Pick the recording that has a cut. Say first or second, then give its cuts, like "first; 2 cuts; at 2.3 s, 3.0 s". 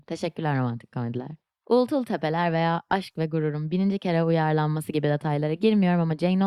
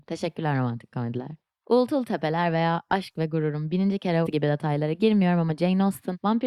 second; 1 cut; at 4.3 s